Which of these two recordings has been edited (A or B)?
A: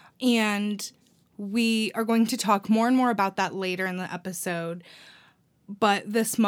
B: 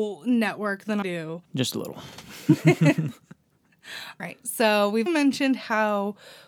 B